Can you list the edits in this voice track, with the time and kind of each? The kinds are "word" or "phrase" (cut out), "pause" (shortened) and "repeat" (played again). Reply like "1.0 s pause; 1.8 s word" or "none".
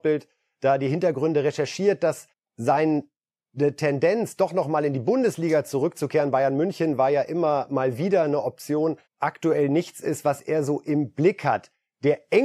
2.3 s pause; 9.1 s pause